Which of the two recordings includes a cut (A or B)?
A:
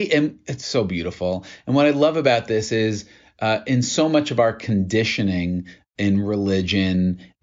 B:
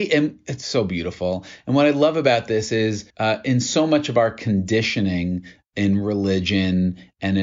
B